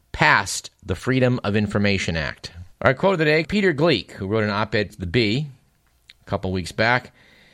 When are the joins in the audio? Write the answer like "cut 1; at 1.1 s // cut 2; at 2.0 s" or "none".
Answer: cut 1; at 2.7 s // cut 2; at 3.4 s // cut 3; at 4.9 s